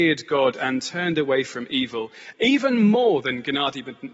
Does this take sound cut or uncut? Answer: uncut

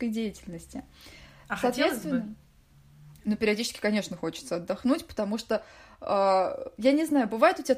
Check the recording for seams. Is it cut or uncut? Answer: uncut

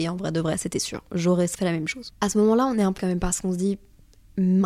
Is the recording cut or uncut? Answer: cut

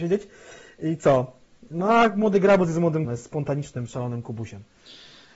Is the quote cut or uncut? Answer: cut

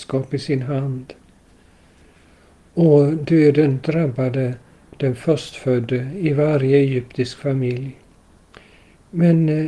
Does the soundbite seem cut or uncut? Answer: uncut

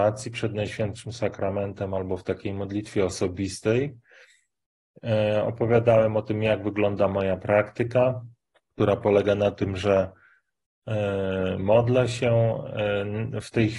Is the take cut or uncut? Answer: cut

